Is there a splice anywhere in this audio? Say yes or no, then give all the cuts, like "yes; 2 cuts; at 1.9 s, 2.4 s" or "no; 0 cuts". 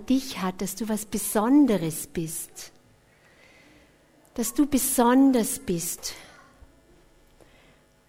no; 0 cuts